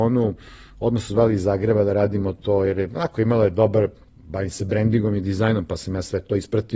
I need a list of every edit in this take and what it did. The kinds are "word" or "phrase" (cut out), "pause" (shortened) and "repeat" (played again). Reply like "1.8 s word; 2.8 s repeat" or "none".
none